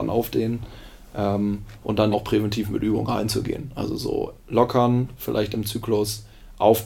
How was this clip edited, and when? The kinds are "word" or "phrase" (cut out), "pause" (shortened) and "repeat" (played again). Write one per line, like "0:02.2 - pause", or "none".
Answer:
0:02.1 - word
0:04.4 - pause